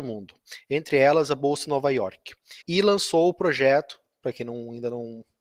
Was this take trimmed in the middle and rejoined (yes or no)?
yes